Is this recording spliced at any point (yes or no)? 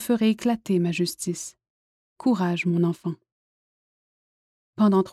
no